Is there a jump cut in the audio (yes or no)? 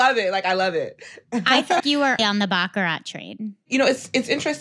yes